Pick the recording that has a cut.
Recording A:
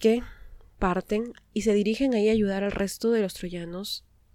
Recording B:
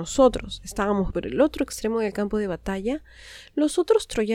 B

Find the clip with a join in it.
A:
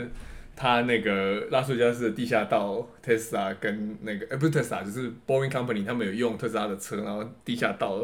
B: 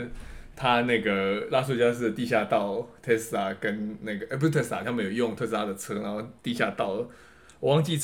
B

